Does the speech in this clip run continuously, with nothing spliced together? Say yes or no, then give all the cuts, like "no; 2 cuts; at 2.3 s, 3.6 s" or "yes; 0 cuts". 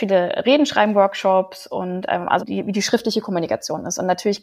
no; 1 cut; at 2.4 s